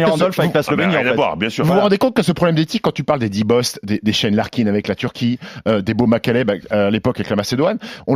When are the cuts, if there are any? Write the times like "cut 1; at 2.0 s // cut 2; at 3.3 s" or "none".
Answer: none